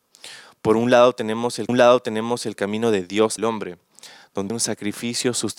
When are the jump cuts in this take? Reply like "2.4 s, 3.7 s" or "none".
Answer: 1.7 s, 3.4 s, 4.5 s